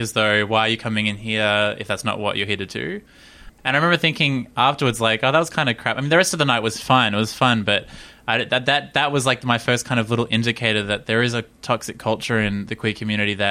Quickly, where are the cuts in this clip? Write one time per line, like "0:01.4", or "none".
none